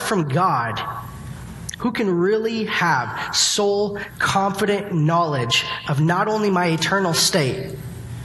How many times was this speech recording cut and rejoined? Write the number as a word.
one